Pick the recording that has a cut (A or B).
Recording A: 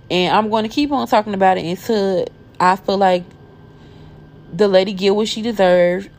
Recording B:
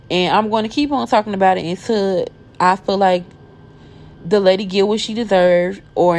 B